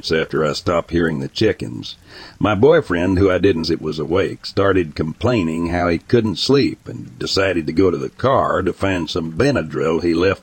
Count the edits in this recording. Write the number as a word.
one